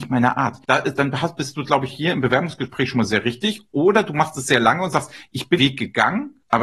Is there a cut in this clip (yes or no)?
yes